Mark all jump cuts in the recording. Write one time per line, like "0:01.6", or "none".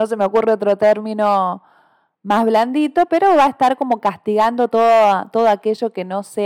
none